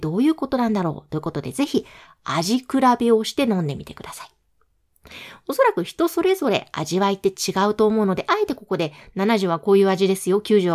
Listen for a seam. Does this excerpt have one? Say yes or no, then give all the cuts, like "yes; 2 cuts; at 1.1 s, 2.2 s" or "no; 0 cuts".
no; 0 cuts